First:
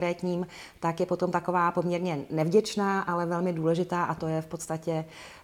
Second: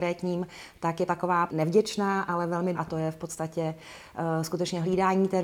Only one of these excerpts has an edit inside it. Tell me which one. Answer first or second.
second